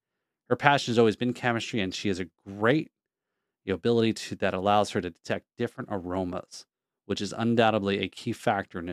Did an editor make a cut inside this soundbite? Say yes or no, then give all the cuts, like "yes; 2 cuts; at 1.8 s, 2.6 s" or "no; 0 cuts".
no; 0 cuts